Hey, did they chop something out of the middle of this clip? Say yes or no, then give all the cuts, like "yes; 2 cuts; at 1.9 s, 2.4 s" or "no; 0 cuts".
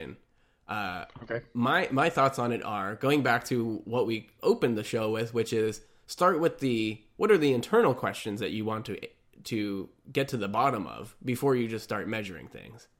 no; 0 cuts